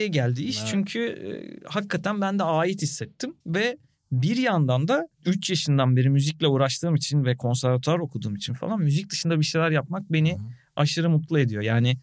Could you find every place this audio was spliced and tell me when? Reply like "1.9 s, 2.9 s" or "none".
3.4 s, 5.1 s